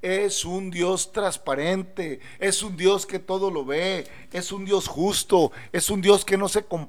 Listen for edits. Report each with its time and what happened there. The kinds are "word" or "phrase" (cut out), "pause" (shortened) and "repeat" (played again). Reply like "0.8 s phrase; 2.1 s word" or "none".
none